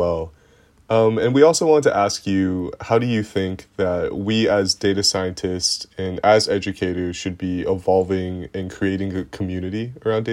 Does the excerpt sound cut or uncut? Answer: uncut